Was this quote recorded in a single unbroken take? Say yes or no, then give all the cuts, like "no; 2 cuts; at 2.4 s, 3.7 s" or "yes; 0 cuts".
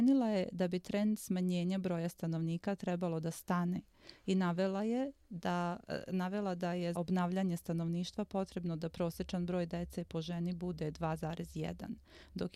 no; 1 cut; at 6.9 s